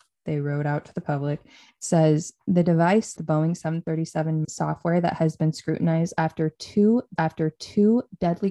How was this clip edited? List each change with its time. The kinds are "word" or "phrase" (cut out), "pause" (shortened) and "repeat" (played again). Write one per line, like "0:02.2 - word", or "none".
0:03.2 - phrase
0:04.4 - word
0:07.2 - repeat